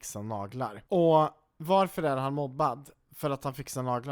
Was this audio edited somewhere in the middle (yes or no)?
no